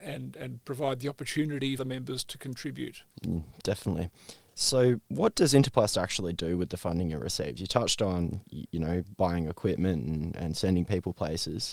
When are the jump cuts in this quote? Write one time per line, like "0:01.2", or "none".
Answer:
0:01.8
0:05.1